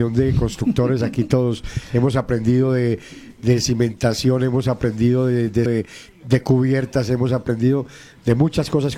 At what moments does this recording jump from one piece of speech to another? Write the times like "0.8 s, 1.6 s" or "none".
5.7 s